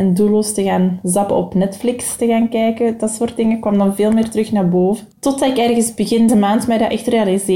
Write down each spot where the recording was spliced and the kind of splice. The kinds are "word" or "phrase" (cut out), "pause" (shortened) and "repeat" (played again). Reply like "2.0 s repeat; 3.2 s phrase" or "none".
5.1 s pause; 6.3 s word